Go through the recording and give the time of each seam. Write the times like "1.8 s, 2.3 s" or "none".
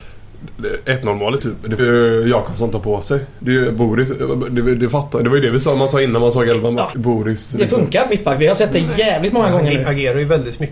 1.4 s, 1.8 s, 6.9 s, 8.1 s

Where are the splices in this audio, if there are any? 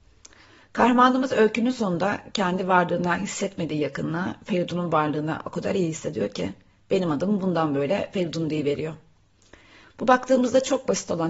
none

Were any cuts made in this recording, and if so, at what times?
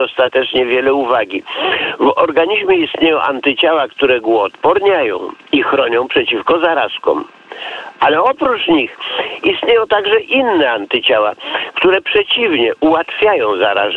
none

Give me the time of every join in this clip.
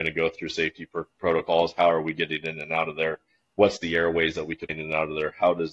4.7 s

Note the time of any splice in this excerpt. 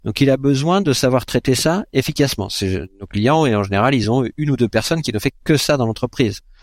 none

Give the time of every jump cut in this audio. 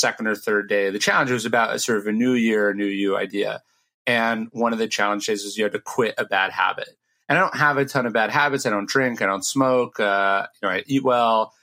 none

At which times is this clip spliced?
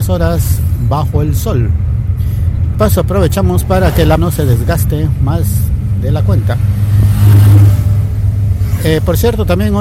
2.7 s, 4.2 s

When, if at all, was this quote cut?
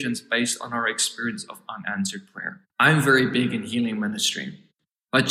2.7 s

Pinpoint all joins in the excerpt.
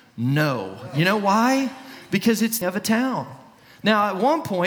2.6 s

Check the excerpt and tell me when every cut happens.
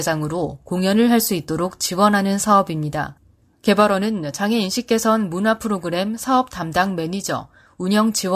none

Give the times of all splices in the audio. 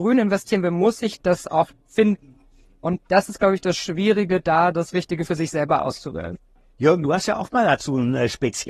none

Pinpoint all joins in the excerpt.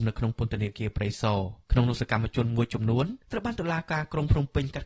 1.6 s, 3.2 s

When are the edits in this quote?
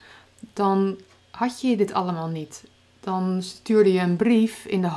none

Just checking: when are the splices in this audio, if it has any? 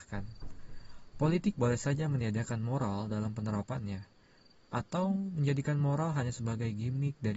none

